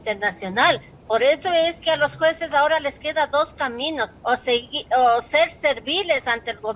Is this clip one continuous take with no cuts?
no; 1 cut; at 4.2 s

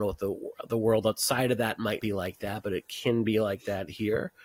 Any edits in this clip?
yes; 1 cut; at 2.0 s

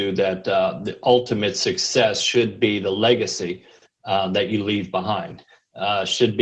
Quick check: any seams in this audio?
no; 0 cuts

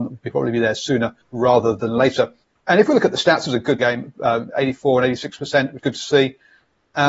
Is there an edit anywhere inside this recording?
yes; 6 cuts; at 1.2 s, 2.4 s, 3.5 s, 3.8 s, 4.1 s, 5.8 s

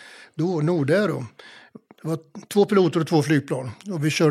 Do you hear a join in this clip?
no; 0 cuts

